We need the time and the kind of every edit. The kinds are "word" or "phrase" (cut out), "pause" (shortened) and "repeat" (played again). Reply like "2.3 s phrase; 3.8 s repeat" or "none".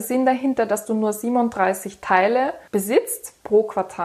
none

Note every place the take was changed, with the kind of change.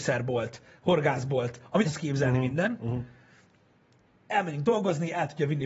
1.8 s word

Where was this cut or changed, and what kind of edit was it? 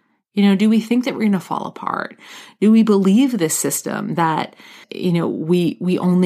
4.8 s word

